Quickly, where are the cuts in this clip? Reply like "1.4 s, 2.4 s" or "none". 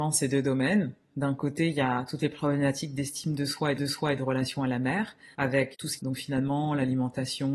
3.8 s, 5.3 s, 6.0 s